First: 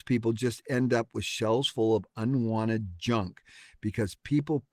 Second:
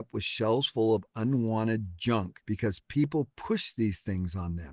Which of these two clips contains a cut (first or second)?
second